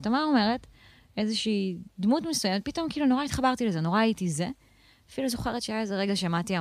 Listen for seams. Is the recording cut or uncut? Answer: uncut